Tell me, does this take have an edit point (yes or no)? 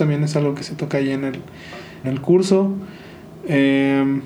yes